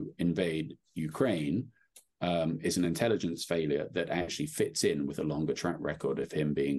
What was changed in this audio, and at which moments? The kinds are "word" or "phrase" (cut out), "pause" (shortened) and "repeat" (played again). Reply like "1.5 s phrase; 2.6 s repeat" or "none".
none